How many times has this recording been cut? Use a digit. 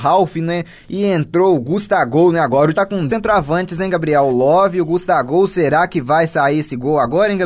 2